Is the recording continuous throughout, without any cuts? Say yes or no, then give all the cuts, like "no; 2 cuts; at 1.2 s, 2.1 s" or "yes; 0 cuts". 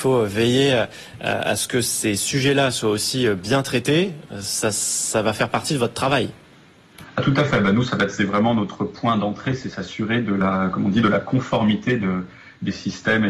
yes; 0 cuts